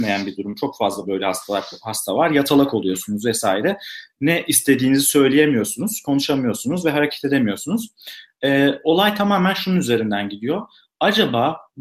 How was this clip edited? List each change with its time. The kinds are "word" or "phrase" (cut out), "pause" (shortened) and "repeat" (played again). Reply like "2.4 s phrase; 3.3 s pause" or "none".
none

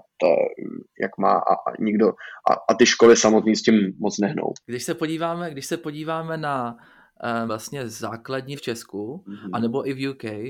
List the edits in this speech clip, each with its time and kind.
4.6 s pause; 7.5 s word; 8.5 s phrase

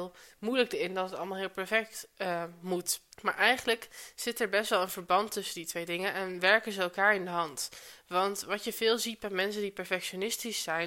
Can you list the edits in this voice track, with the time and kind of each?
3.1 s pause

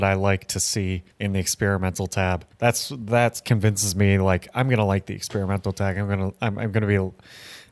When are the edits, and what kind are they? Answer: 1.1 s pause; 2.5 s pause

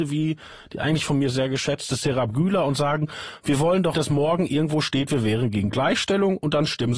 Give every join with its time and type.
3.9 s word

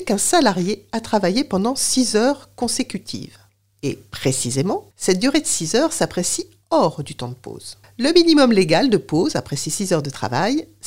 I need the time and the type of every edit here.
3.5 s pause; 4.9 s pause; 7.8 s pause

